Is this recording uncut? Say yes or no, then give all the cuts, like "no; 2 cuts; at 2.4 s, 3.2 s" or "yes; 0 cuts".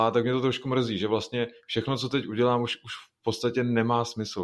yes; 0 cuts